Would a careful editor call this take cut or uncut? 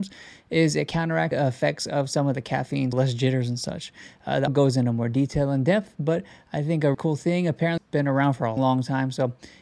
cut